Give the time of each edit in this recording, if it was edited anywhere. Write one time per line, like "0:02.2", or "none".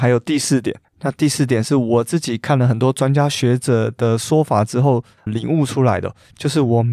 0:05.3

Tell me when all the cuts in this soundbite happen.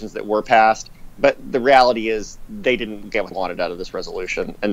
0:03.3

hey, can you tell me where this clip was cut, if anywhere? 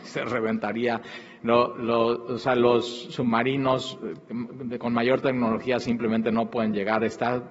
none

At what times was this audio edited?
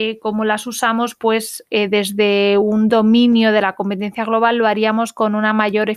none

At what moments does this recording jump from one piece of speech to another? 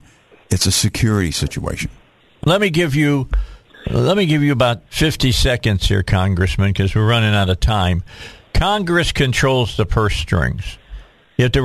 0:02.4
0:04.9

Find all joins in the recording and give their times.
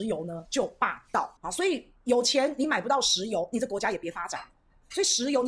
0:01.4

